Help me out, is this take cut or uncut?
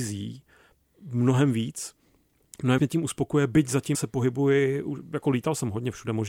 cut